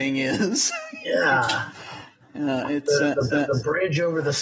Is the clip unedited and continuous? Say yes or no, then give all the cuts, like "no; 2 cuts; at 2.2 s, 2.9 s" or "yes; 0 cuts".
no; 1 cut; at 3.3 s